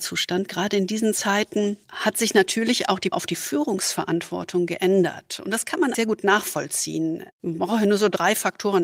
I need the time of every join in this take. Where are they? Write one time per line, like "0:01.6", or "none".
0:01.8
0:03.1
0:05.9